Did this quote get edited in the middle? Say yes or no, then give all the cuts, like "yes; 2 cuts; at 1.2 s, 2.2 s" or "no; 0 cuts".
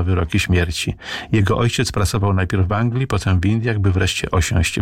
no; 0 cuts